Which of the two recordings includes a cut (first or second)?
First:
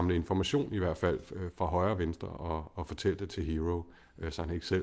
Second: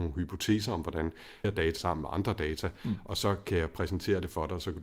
second